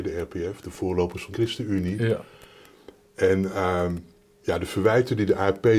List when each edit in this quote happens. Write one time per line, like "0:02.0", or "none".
0:01.3